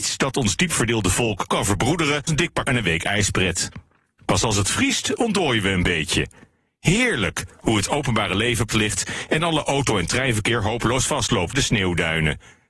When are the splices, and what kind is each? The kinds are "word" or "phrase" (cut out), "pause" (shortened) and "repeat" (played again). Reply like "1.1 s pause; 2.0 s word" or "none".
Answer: 1.5 s word; 2.3 s word; 2.6 s word; 8.7 s word; 11.5 s word